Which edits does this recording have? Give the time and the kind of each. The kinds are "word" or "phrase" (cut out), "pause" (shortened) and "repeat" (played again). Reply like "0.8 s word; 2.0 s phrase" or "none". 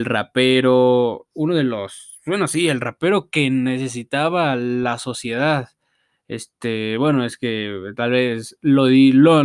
none